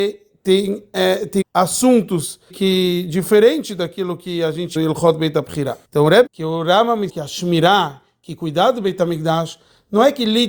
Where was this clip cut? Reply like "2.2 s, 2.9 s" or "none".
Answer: 1.4 s, 2.5 s, 4.8 s, 5.8 s, 6.3 s, 7.1 s